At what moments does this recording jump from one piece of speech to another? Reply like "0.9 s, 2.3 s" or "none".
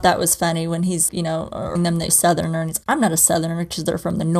1.1 s, 1.8 s, 2.1 s